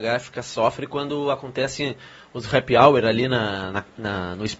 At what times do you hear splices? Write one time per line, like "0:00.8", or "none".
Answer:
none